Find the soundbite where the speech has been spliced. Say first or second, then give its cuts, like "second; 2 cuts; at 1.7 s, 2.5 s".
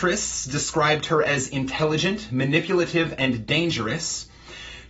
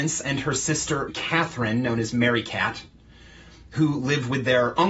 second; 1 cut; at 1.1 s